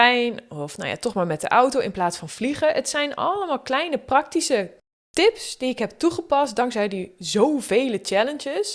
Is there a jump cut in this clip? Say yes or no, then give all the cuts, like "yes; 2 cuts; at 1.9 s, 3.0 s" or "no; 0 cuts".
no; 0 cuts